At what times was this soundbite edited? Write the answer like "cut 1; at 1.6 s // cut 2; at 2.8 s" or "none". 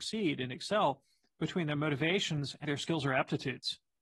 cut 1; at 2.6 s